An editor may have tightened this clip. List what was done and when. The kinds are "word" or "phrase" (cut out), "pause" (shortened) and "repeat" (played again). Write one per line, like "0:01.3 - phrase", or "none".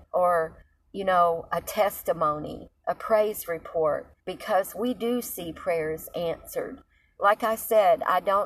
0:02.8 - pause
0:04.2 - pause